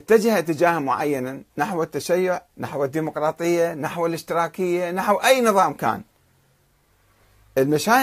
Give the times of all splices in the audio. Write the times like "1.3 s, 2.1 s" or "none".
1.5 s, 2.5 s